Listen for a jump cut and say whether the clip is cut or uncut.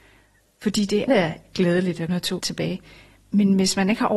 cut